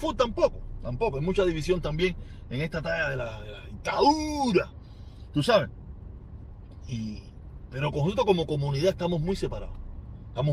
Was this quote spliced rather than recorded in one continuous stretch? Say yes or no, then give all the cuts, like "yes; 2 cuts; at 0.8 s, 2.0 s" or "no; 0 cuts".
no; 0 cuts